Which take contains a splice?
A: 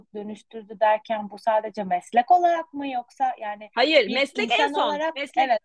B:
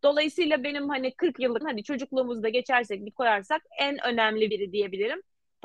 B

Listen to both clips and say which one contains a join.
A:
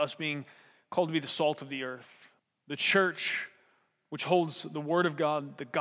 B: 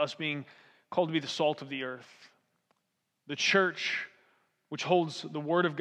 A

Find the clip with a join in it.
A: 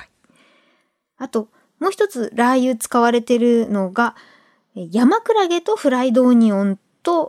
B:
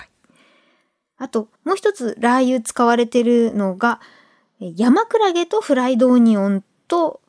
B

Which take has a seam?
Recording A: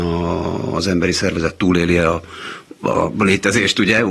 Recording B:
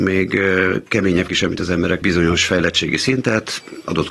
B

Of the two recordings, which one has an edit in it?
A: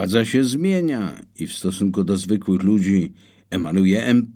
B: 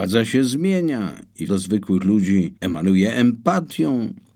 B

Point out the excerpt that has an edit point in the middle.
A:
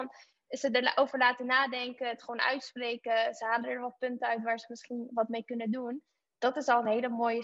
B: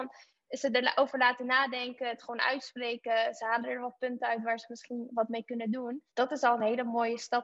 B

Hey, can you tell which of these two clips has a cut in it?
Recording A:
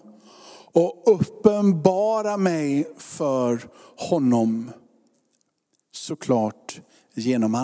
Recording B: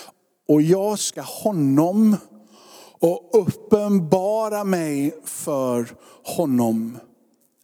B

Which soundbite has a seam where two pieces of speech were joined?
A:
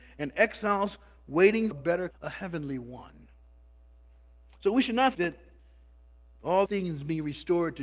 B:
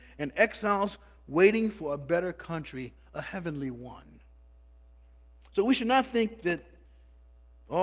A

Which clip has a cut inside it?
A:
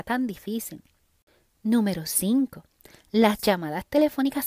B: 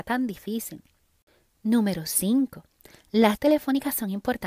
B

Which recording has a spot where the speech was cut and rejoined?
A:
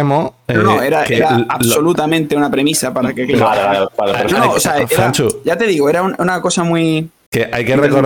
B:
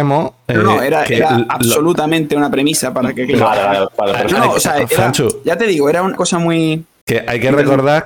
B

